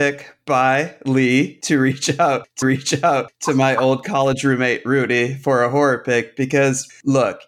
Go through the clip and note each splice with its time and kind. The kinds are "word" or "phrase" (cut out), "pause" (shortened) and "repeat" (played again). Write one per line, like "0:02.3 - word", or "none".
0:02.6 - repeat